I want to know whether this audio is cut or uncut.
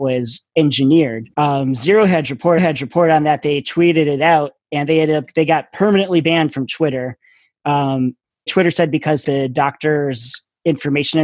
cut